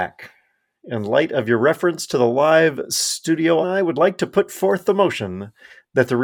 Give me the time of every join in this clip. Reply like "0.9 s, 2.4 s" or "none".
3.6 s